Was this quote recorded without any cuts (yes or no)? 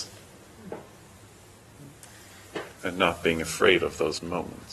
yes